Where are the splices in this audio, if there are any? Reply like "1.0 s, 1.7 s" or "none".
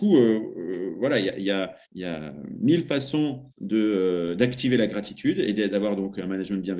1.8 s, 3.5 s